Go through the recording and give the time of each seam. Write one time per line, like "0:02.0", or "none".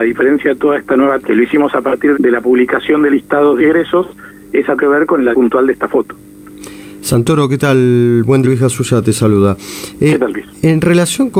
0:01.2
0:02.1
0:03.1
0:03.6
0:04.8
0:05.3
0:08.4